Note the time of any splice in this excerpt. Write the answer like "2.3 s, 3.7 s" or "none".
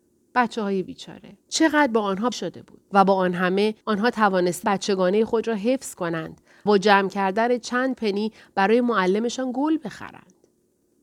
1.4 s, 2.3 s, 2.8 s, 3.8 s, 4.6 s, 6.7 s

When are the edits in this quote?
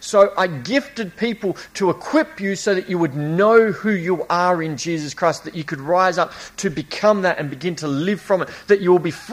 none

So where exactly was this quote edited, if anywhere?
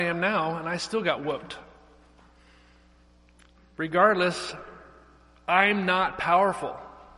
none

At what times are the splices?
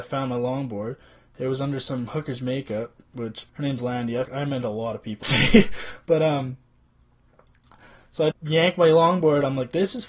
3.5 s, 4.2 s, 5.2 s, 8.3 s

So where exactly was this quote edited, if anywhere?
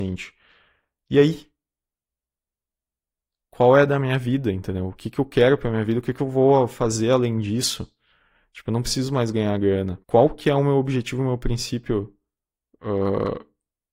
10.0 s

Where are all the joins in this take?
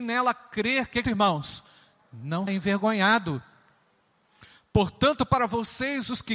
1.0 s, 2.5 s

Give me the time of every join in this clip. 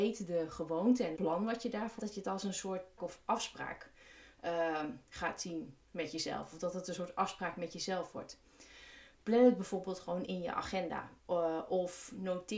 1.1 s, 2.0 s, 3.0 s, 5.1 s, 10.2 s, 11.2 s

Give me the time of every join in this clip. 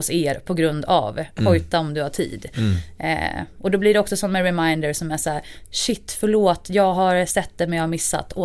none

